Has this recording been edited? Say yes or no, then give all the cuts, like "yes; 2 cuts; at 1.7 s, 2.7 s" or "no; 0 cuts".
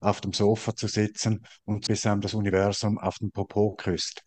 yes; 1 cut; at 1.9 s